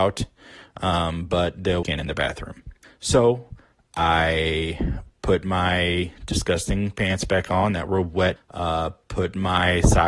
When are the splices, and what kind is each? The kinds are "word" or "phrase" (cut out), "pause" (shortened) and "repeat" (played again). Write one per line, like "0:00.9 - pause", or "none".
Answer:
0:01.8 - phrase
0:02.8 - pause
0:08.4 - word